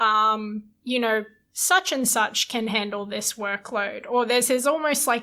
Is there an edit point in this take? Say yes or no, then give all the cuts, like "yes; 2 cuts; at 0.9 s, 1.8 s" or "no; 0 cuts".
no; 0 cuts